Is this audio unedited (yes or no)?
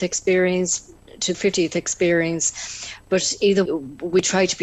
no